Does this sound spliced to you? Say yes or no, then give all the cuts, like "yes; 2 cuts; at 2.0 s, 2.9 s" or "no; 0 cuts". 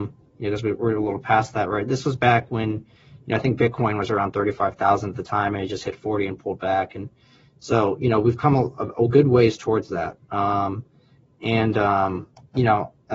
no; 0 cuts